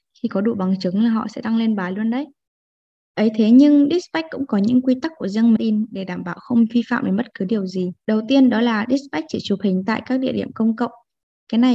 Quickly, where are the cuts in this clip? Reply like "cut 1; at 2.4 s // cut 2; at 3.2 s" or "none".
cut 1; at 5.6 s // cut 2; at 8.0 s